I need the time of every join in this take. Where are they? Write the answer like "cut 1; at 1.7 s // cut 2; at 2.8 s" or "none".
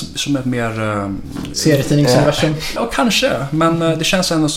cut 1; at 1.5 s // cut 2; at 2.8 s